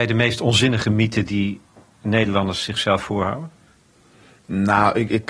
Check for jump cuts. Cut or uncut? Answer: uncut